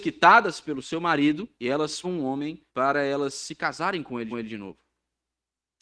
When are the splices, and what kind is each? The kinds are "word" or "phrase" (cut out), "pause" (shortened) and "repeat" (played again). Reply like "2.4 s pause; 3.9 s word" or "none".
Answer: 1.5 s pause; 2.0 s word; 2.7 s pause; 4.3 s repeat

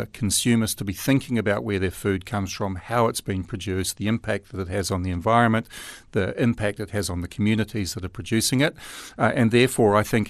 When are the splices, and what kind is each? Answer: none

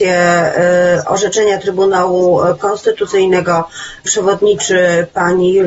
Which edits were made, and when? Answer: 4.1 s word

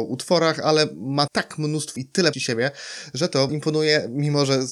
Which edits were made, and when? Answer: 1.3 s word; 2.0 s word; 2.3 s word; 3.5 s word

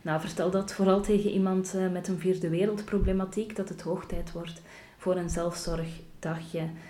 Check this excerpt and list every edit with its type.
none

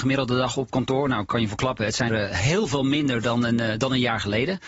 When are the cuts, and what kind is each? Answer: 2.1 s word

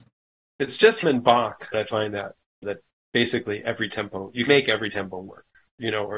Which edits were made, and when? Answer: 1.0 s word; 1.7 s word; 2.6 s word; 4.5 s word

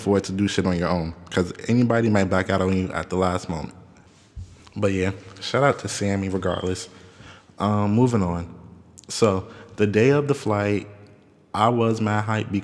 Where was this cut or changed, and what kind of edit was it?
none

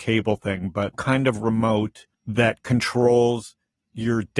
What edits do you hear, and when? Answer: 0.9 s word; 2.1 s pause

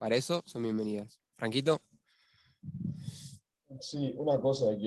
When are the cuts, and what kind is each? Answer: none

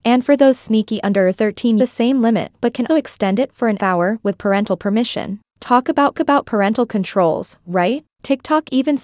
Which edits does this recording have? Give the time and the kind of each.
1.8 s phrase; 2.9 s word; 3.8 s phrase; 5.5 s pause; 6.1 s repeat; 8.1 s pause

